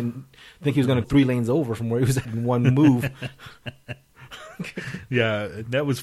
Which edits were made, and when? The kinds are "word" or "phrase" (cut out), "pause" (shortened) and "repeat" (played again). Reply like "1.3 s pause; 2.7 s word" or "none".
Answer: 1.0 s word; 2.2 s word